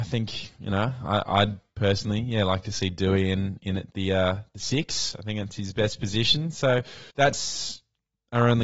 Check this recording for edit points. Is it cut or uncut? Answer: cut